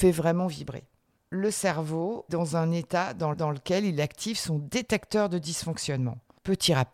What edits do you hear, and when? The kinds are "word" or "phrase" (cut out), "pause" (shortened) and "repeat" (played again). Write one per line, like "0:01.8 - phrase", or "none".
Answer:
0:02.3 - word
0:03.3 - repeat

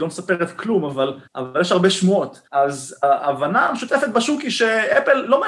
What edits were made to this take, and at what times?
0:01.3 - pause
0:02.5 - pause

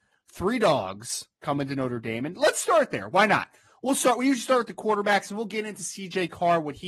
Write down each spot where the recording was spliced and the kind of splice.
none

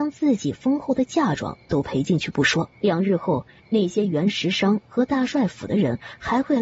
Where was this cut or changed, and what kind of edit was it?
0:02.7 - pause

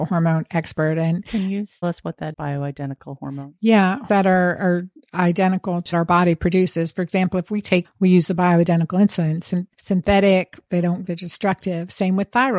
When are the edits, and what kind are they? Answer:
0:01.8 - word
0:02.3 - word
0:04.1 - word
0:05.9 - word
0:07.8 - word
0:10.7 - word
0:11.0 - word

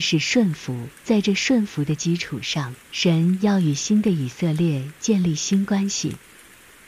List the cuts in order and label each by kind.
0:01.0 - pause
0:02.8 - pause

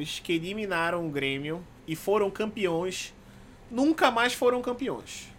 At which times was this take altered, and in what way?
none

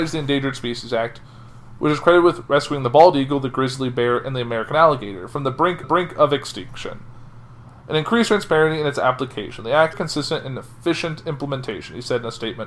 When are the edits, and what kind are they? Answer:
0:05.8 - repeat
0:09.9 - phrase

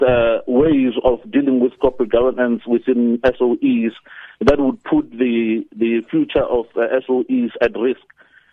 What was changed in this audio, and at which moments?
none

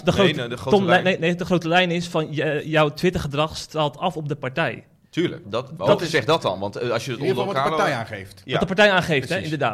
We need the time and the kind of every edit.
0:05.4 - word

